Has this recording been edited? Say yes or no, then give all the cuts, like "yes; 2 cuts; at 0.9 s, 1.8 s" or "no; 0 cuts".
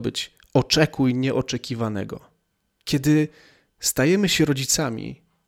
no; 0 cuts